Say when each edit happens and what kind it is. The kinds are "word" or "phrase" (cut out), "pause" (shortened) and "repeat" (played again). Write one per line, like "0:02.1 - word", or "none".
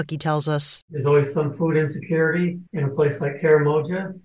0:02.7 - pause